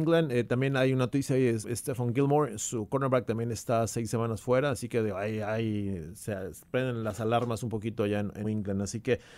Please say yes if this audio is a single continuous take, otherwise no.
no